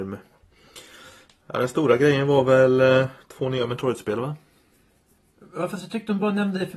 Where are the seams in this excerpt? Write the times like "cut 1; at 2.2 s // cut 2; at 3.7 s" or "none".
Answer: none